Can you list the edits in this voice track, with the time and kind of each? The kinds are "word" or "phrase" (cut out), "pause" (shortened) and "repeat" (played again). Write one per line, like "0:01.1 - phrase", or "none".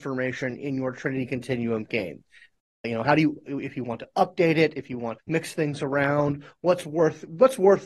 0:05.2 - word